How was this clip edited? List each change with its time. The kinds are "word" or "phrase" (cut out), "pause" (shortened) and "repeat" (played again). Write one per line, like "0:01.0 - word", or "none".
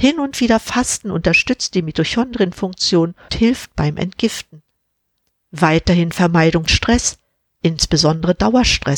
0:03.3 - word
0:06.7 - word